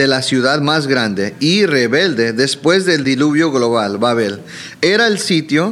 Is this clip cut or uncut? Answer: uncut